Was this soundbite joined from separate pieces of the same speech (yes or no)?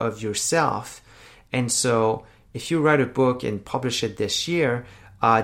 no